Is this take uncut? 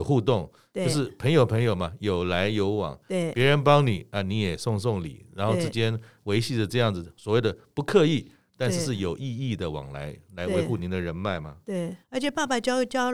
no; 1 cut; at 12.0 s

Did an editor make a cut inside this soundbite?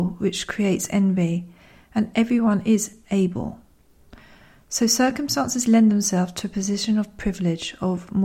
no; 0 cuts

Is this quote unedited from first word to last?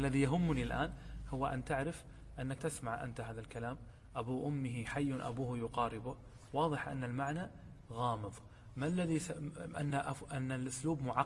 no; 2 cuts; at 2.6 s, 9.9 s

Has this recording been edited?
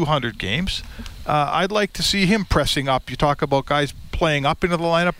no; 0 cuts

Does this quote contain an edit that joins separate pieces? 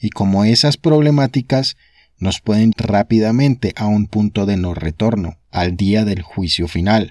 yes; 2 cuts; at 2.7 s, 5.4 s

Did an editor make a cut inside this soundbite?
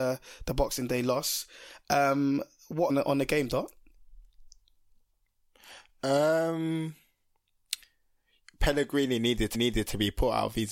yes; 2 cuts; at 2.9 s, 9.5 s

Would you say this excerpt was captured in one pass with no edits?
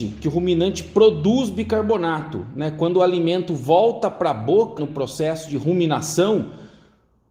no; 1 cut; at 4.8 s

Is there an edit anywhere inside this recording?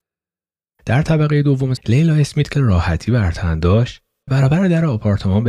yes; 3 cuts; at 1.8 s, 2.5 s, 4.3 s

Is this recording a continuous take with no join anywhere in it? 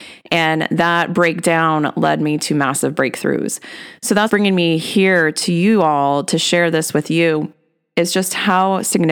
no; 1 cut; at 4.3 s

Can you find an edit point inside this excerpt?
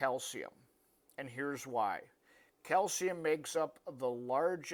no; 0 cuts

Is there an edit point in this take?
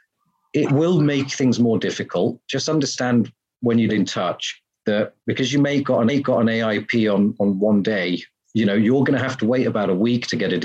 yes; 3 cuts; at 3.9 s, 5.2 s, 6.1 s

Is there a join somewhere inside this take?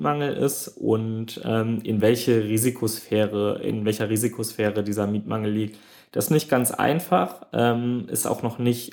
no; 0 cuts

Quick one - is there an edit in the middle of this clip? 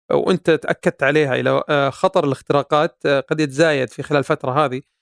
no; 0 cuts

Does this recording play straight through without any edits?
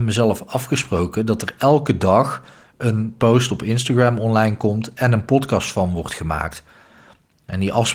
yes; 0 cuts

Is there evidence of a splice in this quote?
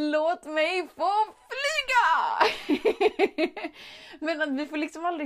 no; 0 cuts

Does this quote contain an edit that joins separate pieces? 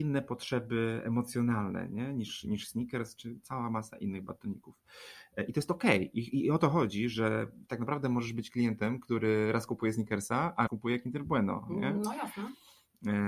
yes; 1 cut; at 10.7 s

